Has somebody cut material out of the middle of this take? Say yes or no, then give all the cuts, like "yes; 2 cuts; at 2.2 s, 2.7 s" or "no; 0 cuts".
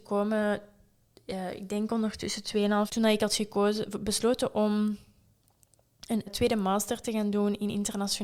yes; 2 cuts; at 2.9 s, 6.3 s